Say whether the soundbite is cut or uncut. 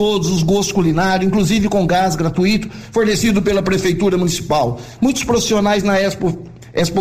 uncut